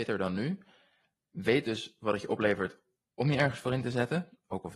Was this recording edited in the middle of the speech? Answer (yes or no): no